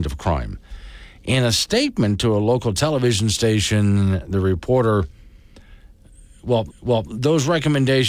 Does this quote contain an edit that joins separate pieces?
yes; 1 cut; at 6.7 s

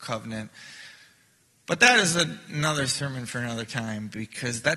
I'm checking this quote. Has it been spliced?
no; 0 cuts

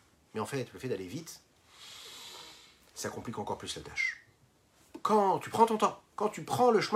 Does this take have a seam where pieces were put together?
no; 0 cuts

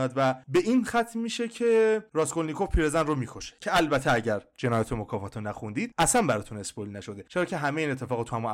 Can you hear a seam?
no; 0 cuts

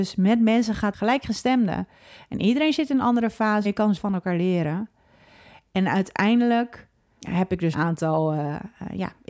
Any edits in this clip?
yes; 5 cuts; at 0.9 s, 3.6 s, 4.0 s, 7.2 s, 7.7 s

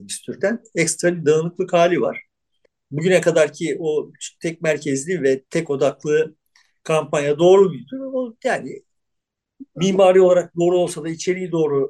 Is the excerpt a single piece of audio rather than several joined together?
no; 1 cut; at 5.5 s

